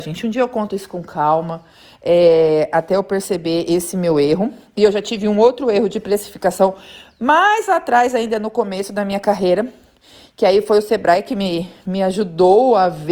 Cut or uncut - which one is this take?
uncut